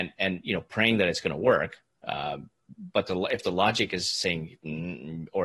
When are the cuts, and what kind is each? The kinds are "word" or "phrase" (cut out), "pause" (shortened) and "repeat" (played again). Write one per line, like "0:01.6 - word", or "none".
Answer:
none